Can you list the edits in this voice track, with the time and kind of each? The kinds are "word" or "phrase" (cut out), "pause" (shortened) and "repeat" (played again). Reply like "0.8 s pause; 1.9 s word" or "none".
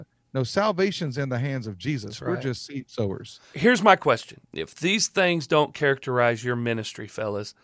4.4 s pause